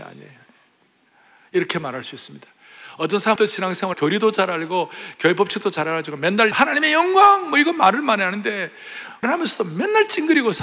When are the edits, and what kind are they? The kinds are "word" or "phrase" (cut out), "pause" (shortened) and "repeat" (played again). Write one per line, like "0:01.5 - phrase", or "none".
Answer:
0:03.4 - word
0:03.9 - word
0:06.5 - word
0:09.2 - word